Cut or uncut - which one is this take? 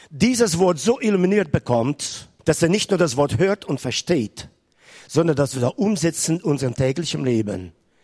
cut